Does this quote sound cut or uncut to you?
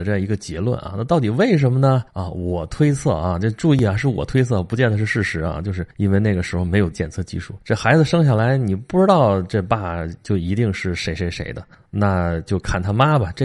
cut